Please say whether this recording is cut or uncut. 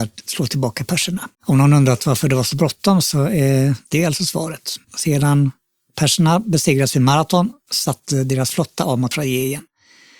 cut